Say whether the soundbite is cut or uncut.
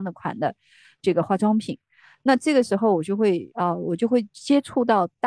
cut